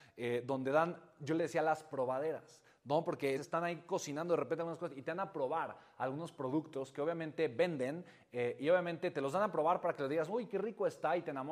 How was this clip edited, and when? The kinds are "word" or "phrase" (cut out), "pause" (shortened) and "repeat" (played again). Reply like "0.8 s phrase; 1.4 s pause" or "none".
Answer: 3.4 s word